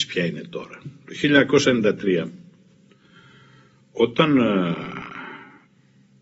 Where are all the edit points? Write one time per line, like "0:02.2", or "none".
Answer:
none